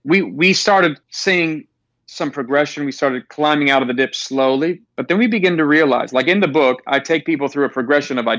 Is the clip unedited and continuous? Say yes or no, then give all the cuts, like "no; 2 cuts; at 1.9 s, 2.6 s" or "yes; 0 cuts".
no; 2 cuts; at 1.0 s, 4.9 s